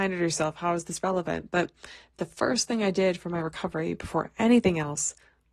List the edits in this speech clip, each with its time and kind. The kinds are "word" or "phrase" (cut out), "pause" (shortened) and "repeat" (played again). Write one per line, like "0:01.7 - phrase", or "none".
none